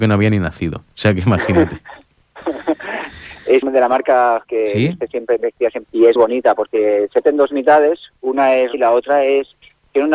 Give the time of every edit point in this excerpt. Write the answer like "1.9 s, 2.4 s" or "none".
3.6 s, 4.5 s, 5.8 s, 6.2 s, 7.2 s, 8.7 s